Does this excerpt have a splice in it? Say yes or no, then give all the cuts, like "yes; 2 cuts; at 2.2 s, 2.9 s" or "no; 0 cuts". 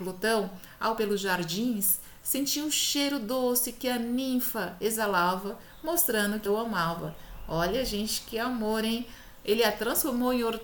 yes; 2 cuts; at 1.0 s, 6.5 s